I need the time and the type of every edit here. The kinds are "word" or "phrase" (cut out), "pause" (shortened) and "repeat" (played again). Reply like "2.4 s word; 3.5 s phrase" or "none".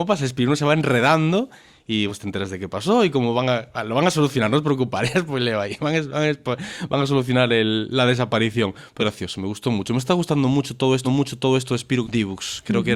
2.1 s word; 9.0 s word; 11.0 s repeat; 12.0 s phrase

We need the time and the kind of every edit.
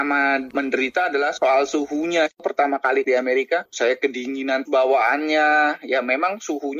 3.0 s word; 4.7 s word

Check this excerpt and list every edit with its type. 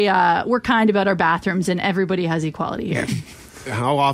none

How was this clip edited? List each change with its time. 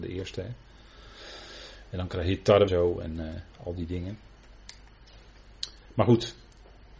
2.7 s word

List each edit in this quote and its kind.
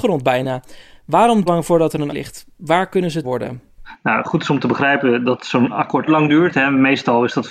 1.5 s phrase; 2.1 s word; 3.2 s phrase; 6.1 s word

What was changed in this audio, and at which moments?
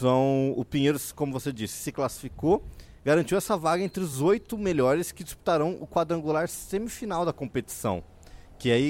none

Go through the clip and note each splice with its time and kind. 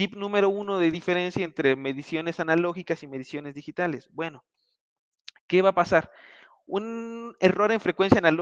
none

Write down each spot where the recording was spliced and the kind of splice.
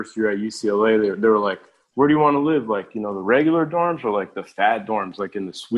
none

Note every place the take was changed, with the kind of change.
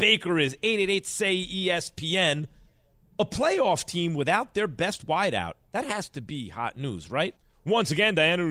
none

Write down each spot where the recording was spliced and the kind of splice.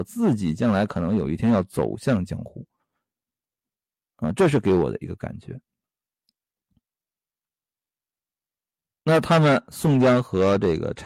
none

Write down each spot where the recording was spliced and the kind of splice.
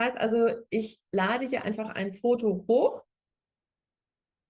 none

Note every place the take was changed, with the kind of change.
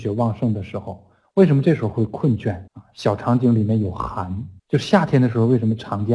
2.7 s pause; 4.6 s pause

